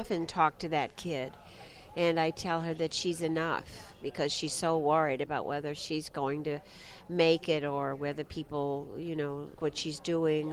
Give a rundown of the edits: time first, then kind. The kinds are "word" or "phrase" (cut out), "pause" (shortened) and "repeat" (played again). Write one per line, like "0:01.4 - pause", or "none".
0:09.6 - word

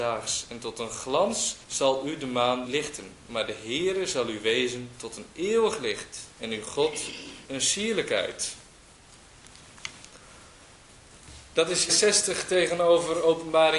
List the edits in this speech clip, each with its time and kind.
0:01.6 - pause
0:02.7 - word
0:07.4 - word
0:11.9 - word

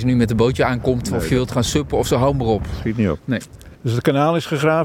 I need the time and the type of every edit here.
0:03.7 - pause

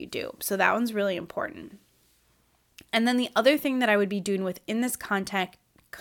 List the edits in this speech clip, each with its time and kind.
none

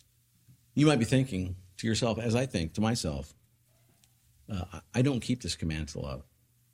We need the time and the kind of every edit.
none

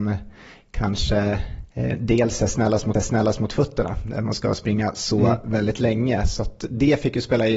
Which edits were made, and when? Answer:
0:02.9 - repeat

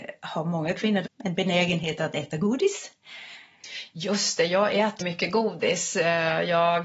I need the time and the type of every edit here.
0:01.1 - word
0:05.0 - word

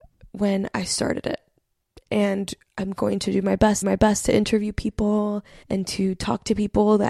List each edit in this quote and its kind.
0:03.8 - repeat
0:05.6 - pause

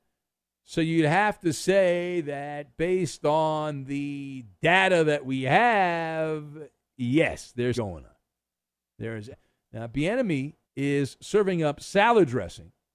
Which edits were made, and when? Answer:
0:07.7 - word
0:09.3 - phrase
0:10.6 - pause

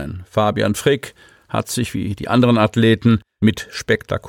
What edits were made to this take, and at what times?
none

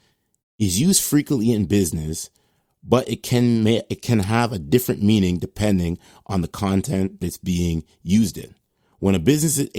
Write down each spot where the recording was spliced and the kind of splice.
0:07.2 - word

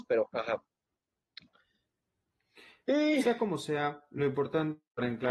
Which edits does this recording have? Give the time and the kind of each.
none

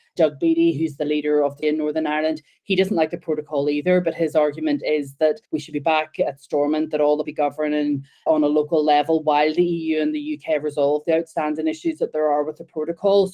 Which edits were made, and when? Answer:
0:01.6 - phrase
0:05.5 - pause
0:07.2 - phrase

